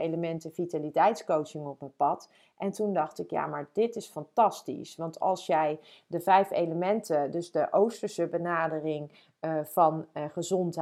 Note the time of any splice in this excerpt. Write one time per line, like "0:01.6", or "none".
none